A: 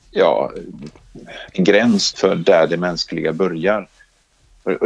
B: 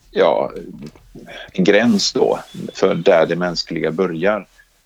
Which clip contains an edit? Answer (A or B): A